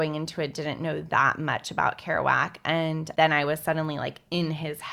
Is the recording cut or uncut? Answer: uncut